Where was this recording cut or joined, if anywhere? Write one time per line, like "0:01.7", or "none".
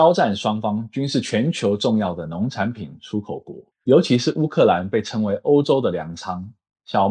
0:03.7